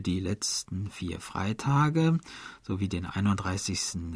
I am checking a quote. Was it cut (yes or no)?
no